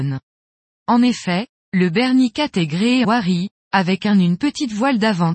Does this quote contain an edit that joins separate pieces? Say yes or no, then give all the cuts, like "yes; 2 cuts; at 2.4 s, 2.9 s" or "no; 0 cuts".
yes; 1 cut; at 3.0 s